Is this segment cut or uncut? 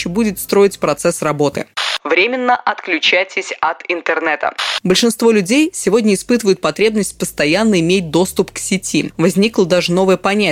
uncut